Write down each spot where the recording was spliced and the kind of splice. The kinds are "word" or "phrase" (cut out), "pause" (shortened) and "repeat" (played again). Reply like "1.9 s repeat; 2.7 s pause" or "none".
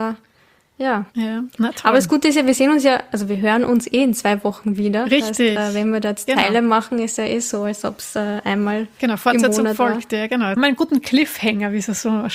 1.1 s pause; 6.3 s word